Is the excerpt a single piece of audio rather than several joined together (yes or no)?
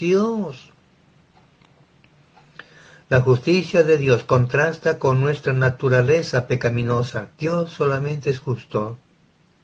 no